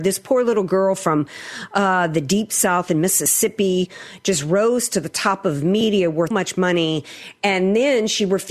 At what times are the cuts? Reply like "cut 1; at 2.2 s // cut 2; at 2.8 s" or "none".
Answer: cut 1; at 6.3 s